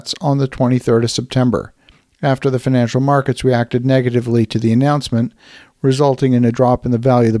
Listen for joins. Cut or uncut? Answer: uncut